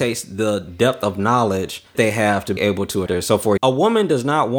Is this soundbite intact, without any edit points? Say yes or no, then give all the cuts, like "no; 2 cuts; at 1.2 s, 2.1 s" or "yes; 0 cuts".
no; 4 cuts; at 1.9 s, 2.6 s, 3.1 s, 3.6 s